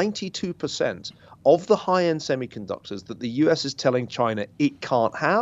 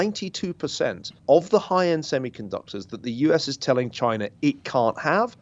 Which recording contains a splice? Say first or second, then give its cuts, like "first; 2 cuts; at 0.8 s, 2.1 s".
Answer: second; 1 cut; at 1.2 s